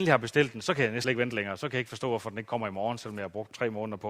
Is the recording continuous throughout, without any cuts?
no; 1 cut; at 1.0 s

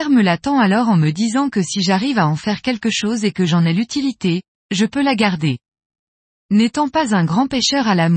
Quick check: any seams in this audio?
no; 0 cuts

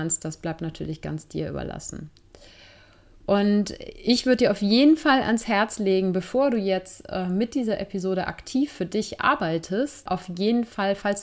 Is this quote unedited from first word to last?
yes; 0 cuts

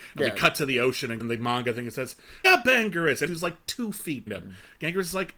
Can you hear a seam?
yes; 4 cuts; at 1.2 s, 2.4 s, 3.3 s, 4.3 s

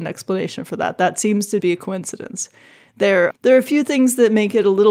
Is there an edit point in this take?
yes; 2 cuts; at 1.6 s, 3.3 s

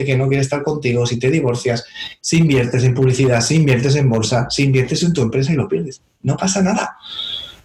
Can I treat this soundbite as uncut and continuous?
yes; 0 cuts

